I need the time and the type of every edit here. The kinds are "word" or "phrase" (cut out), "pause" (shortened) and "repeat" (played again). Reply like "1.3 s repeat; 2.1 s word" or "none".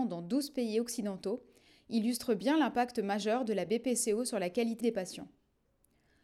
4.8 s phrase